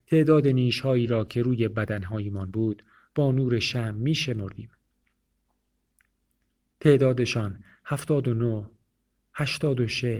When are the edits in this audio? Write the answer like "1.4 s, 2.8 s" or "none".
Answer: none